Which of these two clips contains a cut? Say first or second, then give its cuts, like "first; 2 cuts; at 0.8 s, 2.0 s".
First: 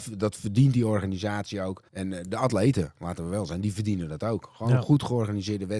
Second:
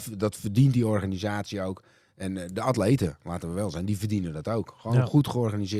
first; 1 cut; at 1.9 s